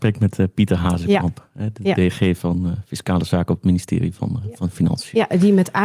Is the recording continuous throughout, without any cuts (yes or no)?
yes